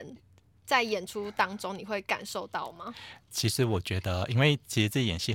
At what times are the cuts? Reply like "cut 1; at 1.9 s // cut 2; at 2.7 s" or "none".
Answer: cut 1; at 3.2 s